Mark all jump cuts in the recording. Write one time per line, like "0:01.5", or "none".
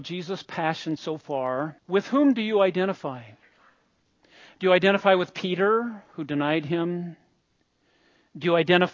0:01.8